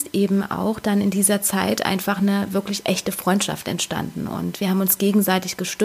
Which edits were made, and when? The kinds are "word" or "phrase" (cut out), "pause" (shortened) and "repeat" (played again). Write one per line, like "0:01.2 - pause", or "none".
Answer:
none